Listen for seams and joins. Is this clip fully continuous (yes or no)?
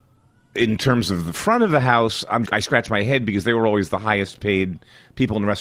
no